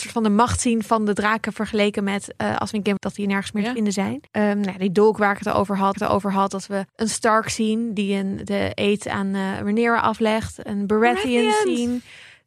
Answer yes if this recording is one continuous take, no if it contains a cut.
no